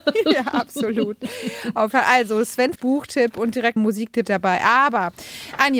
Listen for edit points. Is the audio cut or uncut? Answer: cut